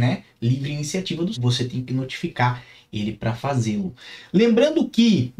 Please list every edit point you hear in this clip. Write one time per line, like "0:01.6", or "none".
0:01.3